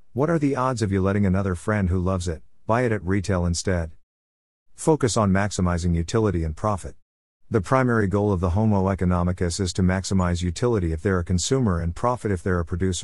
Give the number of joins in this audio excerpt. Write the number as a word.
zero